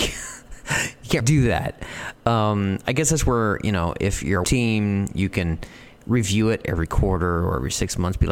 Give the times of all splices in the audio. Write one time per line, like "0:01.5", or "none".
0:01.2
0:04.4